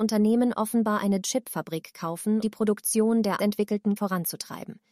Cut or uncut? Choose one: cut